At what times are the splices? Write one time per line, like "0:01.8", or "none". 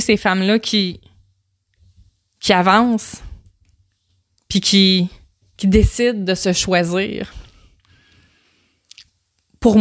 none